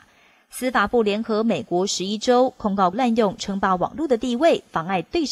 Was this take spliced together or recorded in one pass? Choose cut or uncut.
cut